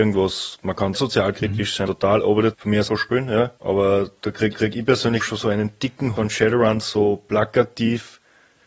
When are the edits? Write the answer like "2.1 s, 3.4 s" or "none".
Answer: 0.9 s, 1.9 s, 2.5 s, 2.9 s, 3.6 s, 4.5 s, 5.2 s, 6.2 s